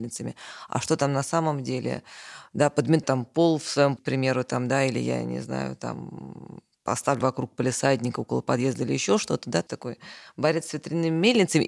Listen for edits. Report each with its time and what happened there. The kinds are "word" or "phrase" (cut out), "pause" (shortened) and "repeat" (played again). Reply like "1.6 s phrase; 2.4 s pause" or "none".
3.0 s word; 4.0 s word; 7.2 s word; 9.7 s word